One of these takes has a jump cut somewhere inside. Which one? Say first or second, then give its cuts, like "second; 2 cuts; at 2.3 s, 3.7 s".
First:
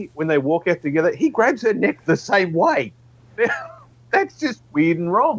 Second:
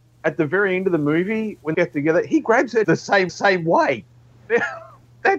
second; 3 cuts; at 1.7 s, 2.8 s, 3.3 s